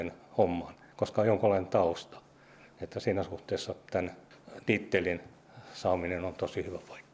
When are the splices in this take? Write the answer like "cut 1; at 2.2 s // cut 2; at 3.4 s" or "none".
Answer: none